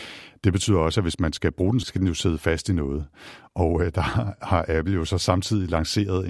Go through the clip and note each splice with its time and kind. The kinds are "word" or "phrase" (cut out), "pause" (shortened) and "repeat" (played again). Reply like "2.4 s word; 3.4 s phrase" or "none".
1.8 s word